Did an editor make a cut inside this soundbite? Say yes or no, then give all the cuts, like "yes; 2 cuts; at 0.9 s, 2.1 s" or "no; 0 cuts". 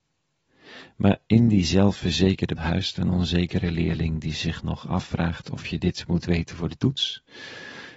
yes; 1 cut; at 2.6 s